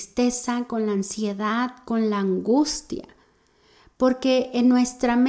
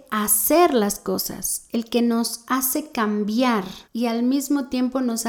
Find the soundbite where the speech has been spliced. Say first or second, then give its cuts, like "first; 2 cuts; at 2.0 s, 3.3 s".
second; 1 cut; at 3.8 s